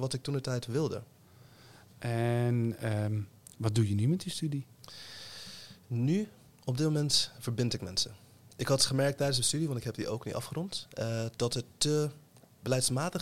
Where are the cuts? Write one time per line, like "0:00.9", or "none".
none